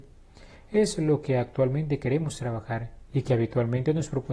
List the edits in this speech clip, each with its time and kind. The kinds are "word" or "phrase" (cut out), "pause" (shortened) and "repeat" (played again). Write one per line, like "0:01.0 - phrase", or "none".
none